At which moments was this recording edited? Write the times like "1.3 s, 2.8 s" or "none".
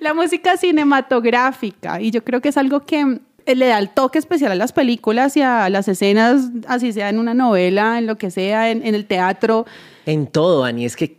none